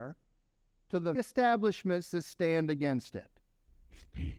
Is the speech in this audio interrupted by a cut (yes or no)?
yes